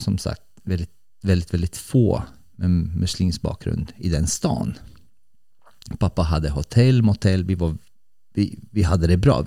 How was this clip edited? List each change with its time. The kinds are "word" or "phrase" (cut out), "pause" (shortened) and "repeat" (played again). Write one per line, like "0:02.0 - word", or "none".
none

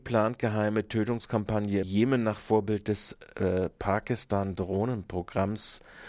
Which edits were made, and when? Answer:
0:01.8 - word

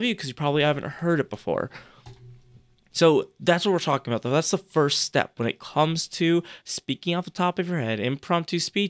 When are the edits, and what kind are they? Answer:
none

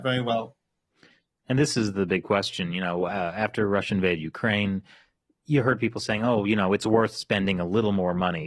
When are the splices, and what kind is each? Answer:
none

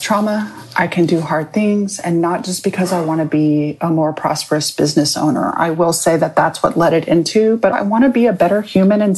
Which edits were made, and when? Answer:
0:07.7 - word

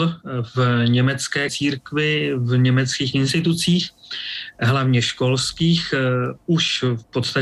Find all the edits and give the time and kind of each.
0:01.5 - word
0:03.1 - word

